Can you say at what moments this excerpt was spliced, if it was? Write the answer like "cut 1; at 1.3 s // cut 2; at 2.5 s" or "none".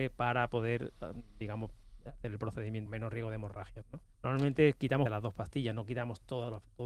cut 1; at 2.9 s // cut 2; at 4.1 s // cut 3; at 5.1 s